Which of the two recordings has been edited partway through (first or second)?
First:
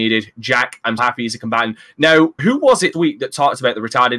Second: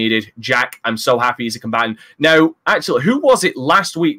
first